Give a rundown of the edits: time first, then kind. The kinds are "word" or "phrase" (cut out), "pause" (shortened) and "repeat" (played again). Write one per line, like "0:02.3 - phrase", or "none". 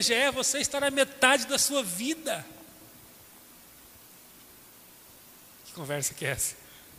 none